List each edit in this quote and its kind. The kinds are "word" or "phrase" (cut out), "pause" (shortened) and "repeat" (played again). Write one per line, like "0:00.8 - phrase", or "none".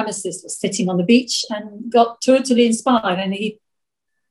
none